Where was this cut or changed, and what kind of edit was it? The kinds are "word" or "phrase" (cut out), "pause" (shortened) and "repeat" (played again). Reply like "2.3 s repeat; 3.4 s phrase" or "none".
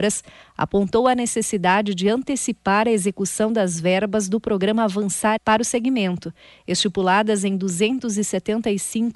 5.4 s word